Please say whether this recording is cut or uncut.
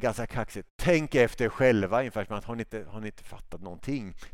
uncut